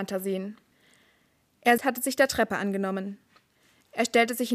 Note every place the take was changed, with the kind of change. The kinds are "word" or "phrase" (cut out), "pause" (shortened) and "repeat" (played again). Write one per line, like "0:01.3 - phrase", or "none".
0:01.8 - word